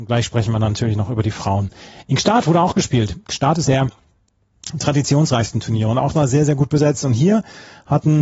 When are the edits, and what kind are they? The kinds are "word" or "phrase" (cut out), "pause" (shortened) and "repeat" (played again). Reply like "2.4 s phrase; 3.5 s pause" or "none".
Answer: 3.7 s word; 6.1 s word